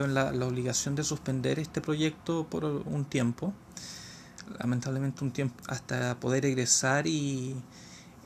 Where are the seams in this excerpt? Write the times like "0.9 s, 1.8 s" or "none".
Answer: 5.6 s